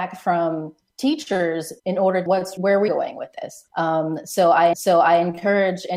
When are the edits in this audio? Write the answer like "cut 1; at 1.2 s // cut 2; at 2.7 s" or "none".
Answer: cut 1; at 1.8 s // cut 2; at 2.3 s // cut 3; at 2.6 s // cut 4; at 2.9 s // cut 5; at 3.7 s // cut 6; at 4.7 s